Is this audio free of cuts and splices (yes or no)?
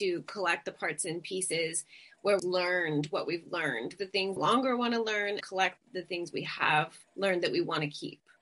no